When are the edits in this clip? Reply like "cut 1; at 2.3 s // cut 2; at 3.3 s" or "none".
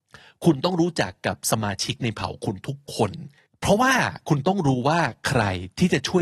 cut 1; at 3.5 s